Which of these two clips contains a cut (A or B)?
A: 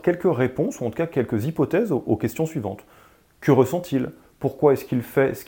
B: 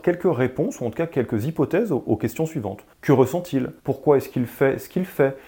B